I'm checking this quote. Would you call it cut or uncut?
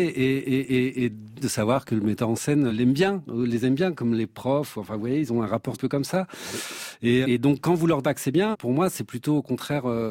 cut